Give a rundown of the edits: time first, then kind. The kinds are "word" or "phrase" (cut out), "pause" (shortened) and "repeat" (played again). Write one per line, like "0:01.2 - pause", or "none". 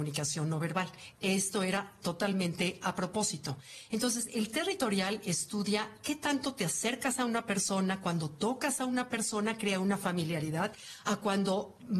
none